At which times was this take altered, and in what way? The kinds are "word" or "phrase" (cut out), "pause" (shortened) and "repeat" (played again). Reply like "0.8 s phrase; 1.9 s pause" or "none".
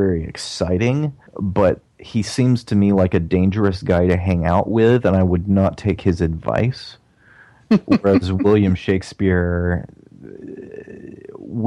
1.3 s pause